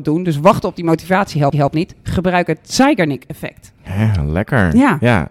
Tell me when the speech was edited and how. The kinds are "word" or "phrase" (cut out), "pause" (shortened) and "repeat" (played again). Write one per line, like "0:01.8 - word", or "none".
0:01.5 - repeat